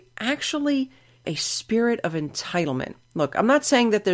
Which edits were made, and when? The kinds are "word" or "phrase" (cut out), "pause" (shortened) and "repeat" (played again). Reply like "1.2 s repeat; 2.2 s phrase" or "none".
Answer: 1.2 s word